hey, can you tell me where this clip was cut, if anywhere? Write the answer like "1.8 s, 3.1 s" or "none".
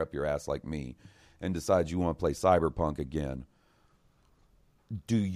none